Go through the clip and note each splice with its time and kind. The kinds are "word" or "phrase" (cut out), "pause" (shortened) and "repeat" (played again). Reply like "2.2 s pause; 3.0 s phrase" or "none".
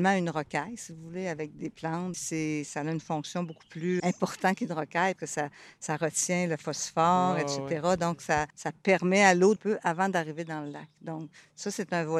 2.1 s word; 4.0 s word; 5.2 s word; 8.5 s pause; 9.6 s phrase